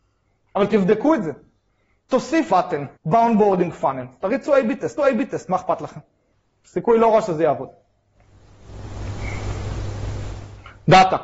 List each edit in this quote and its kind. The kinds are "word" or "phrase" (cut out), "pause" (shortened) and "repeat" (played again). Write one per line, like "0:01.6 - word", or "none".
0:02.5 - word
0:03.0 - pause
0:05.0 - repeat
0:06.3 - pause